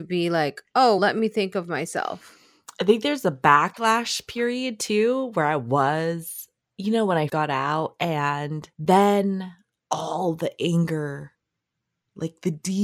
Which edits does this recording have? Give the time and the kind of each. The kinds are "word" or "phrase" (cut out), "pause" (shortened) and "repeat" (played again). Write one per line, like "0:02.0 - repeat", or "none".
0:01.0 - word
0:06.6 - pause
0:07.3 - word
0:08.7 - pause